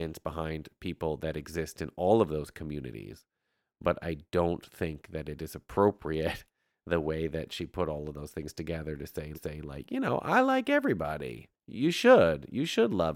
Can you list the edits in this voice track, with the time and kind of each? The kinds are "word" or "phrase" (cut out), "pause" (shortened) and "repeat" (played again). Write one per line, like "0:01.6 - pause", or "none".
0:09.3 - repeat